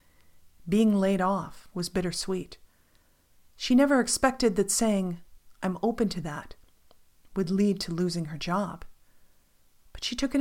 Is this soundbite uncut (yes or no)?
yes